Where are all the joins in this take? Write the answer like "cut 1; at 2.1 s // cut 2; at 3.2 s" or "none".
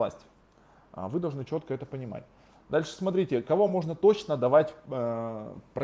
none